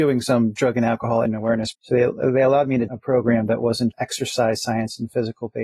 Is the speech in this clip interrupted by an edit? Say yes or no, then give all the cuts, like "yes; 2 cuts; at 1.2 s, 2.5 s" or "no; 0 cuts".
yes; 4 cuts; at 1.3 s, 1.7 s, 2.9 s, 3.9 s